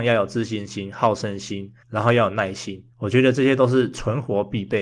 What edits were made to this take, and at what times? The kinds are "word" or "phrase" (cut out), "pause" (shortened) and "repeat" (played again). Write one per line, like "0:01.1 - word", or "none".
0:01.8 - pause
0:02.9 - pause